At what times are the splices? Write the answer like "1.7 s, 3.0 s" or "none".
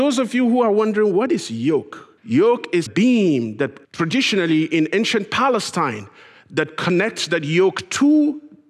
2.2 s, 2.9 s, 3.8 s